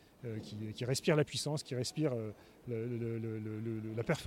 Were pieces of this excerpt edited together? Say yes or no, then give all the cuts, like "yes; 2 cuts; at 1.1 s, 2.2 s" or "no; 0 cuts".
no; 0 cuts